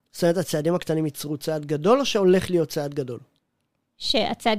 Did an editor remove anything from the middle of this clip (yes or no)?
no